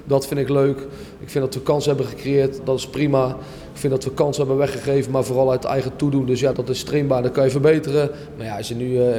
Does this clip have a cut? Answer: yes; 2 cuts; at 2.6 s, 6.5 s

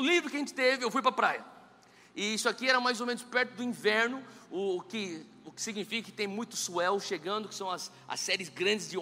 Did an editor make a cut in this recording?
no; 0 cuts

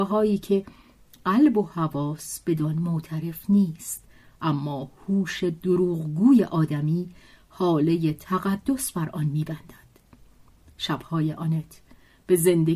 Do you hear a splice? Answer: no; 0 cuts

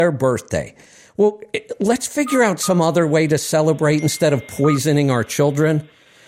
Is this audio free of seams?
yes; 0 cuts

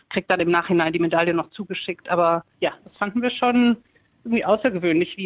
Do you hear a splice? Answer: no; 0 cuts

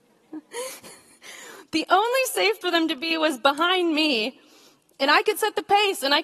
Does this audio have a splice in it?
yes; 1 cut; at 2.6 s

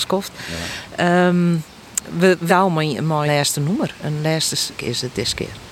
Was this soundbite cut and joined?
yes; 3 cuts; at 2.5 s, 3.3 s, 4.7 s

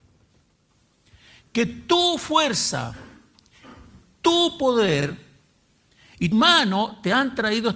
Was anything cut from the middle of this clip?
yes; 1 cut; at 6.3 s

